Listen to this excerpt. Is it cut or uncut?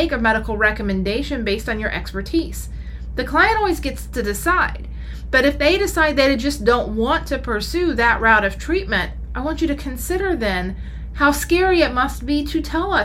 uncut